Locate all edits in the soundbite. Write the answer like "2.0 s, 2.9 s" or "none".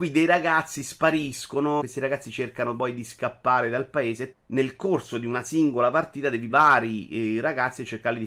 1.8 s, 4.3 s, 6.5 s